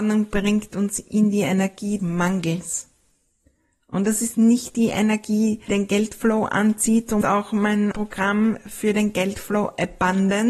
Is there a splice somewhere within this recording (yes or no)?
yes